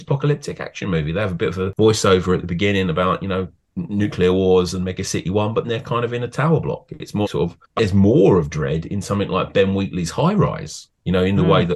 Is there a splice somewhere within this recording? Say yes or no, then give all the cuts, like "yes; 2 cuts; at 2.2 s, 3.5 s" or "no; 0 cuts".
yes; 3 cuts; at 5.6 s, 7.2 s, 7.8 s